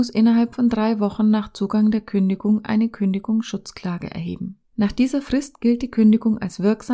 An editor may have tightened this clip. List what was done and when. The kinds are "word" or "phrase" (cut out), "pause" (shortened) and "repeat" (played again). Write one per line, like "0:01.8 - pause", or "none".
0:04.7 - pause